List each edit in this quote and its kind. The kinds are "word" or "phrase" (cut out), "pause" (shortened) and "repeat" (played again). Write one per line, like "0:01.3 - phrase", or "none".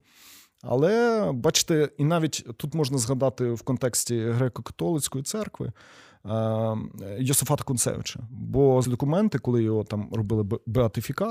0:08.8 - word